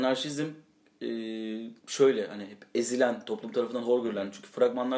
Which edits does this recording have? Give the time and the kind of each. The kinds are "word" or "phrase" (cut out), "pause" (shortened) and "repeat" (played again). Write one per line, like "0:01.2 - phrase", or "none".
0:01.8 - pause

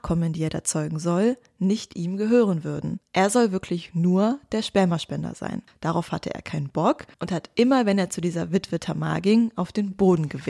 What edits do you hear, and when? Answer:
0:07.1 - pause

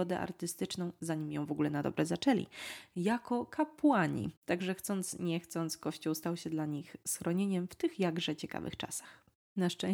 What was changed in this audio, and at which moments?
0:04.4 - pause

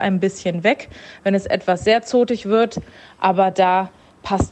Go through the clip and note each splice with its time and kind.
none

